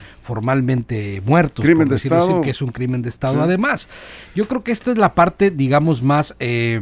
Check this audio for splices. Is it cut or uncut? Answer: uncut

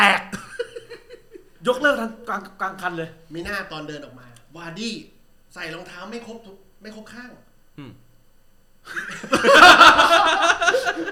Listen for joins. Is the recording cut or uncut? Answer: uncut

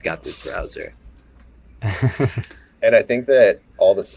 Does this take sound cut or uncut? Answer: uncut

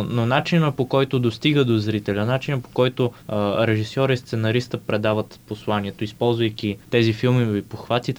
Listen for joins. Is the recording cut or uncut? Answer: cut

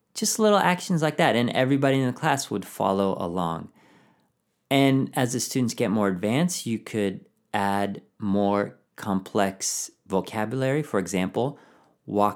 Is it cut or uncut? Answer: cut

